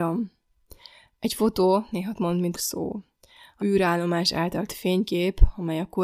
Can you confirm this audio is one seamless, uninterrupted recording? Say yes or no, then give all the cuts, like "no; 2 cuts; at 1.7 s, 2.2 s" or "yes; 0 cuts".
no; 4 cuts; at 2.1 s, 2.5 s, 3.6 s, 4.7 s